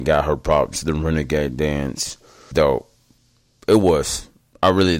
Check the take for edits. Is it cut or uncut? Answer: cut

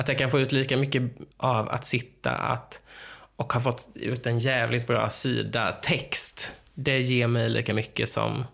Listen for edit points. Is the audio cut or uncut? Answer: cut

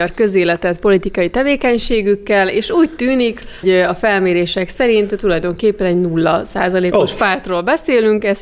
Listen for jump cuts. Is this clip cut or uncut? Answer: cut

